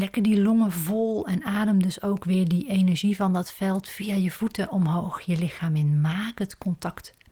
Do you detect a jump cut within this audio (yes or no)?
no